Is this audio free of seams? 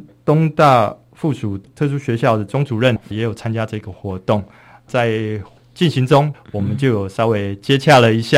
yes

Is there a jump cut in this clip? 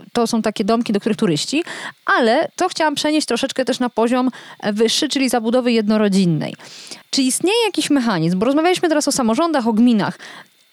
yes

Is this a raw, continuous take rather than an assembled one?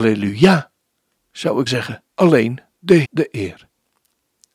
no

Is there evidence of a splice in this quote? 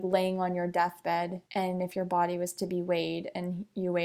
yes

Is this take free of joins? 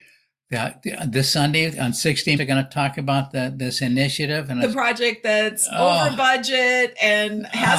no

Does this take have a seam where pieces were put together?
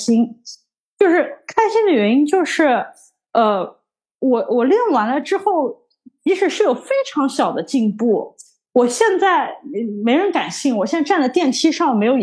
no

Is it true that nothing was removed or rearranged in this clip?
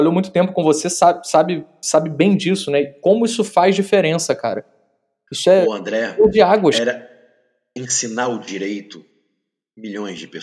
yes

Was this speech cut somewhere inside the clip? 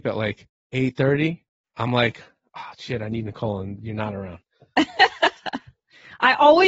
no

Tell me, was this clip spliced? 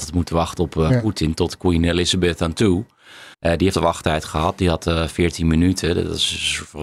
yes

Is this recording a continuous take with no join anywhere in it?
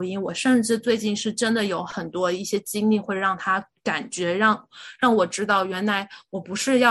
yes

